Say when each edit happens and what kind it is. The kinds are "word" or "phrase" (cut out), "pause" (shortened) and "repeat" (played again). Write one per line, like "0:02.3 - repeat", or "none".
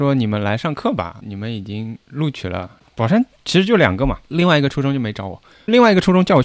0:02.0 - pause
0:04.3 - word